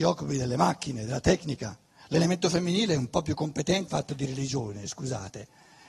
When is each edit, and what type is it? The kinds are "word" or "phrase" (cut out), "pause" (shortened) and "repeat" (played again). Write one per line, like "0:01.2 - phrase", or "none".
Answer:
0:03.9 - word